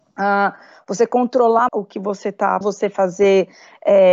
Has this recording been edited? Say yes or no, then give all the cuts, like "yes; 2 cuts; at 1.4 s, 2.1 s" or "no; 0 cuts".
yes; 2 cuts; at 1.7 s, 2.6 s